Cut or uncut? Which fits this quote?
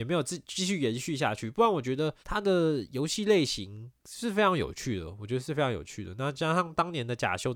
cut